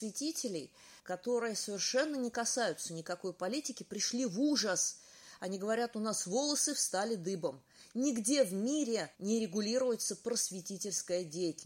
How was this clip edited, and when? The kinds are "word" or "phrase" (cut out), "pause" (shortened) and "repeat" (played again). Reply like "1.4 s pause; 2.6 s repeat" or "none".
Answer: 1.0 s pause; 9.1 s pause